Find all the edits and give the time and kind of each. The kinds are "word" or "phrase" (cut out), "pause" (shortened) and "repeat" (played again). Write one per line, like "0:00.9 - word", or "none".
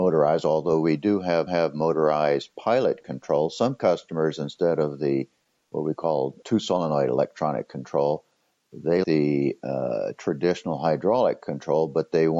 0:01.5 - repeat
0:09.0 - word

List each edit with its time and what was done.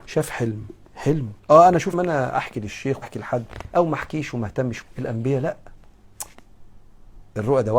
0:01.4 - pause
0:01.9 - word
0:03.0 - word
0:04.8 - word

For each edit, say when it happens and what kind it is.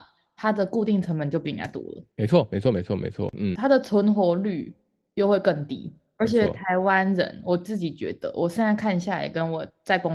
0:03.5 - word

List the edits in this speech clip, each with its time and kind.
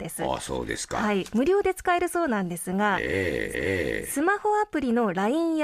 0:03.5 - repeat

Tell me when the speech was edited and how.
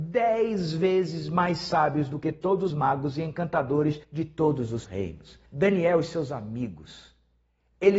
0:02.7 - word
0:04.0 - pause
0:04.8 - word
0:05.5 - pause

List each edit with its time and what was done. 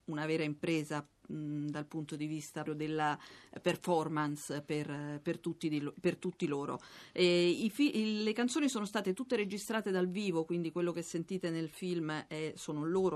0:02.7 - word

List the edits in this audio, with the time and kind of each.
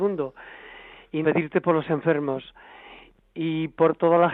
0:01.2 - word

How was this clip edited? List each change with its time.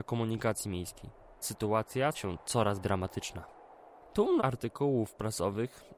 0:01.4 - word
0:02.1 - word
0:02.8 - word
0:04.4 - word

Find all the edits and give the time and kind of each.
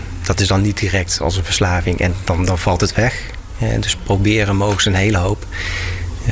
0:01.2 - word

